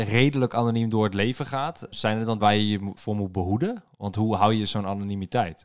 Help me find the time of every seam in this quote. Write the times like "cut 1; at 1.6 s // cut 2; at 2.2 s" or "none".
cut 1; at 1.9 s // cut 2; at 2.4 s // cut 3; at 3.0 s